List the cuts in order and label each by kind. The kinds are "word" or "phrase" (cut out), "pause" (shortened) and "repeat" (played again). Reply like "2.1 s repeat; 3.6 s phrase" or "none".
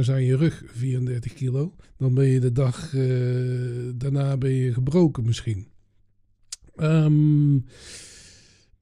1.8 s pause